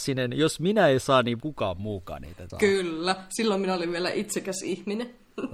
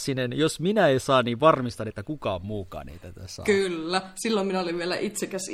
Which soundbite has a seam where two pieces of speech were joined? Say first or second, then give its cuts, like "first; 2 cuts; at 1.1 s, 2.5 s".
first; 2 cuts; at 1.4 s, 2.5 s